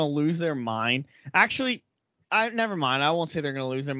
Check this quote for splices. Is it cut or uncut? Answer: cut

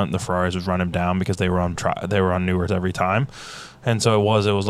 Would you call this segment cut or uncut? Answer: cut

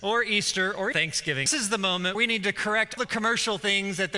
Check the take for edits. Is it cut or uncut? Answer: cut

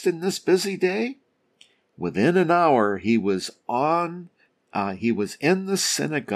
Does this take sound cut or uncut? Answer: uncut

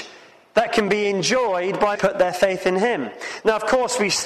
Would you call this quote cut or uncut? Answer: cut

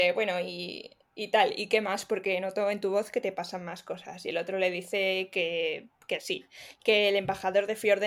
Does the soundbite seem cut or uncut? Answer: uncut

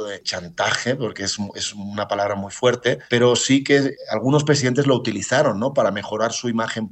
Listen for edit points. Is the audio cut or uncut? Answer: uncut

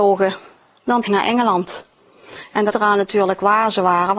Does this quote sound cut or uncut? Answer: cut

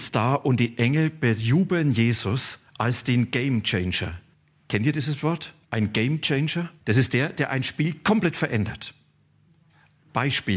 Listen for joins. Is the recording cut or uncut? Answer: cut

